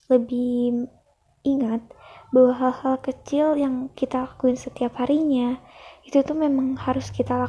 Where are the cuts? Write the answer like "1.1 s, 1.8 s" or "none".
none